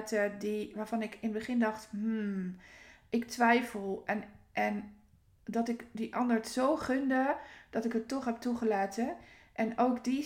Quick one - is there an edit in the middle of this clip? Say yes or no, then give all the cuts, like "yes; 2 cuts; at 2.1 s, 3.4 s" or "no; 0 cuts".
no; 0 cuts